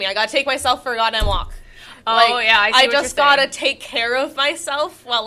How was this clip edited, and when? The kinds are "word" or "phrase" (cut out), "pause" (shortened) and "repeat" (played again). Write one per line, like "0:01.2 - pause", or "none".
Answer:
none